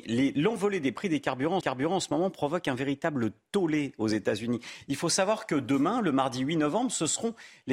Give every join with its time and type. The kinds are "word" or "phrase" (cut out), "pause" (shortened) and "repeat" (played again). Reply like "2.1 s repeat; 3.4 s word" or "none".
1.6 s repeat